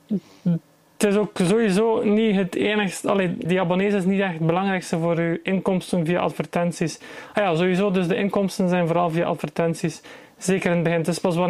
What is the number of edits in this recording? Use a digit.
1